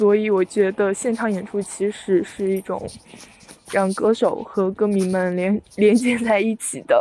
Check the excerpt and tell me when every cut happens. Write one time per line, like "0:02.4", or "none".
0:03.6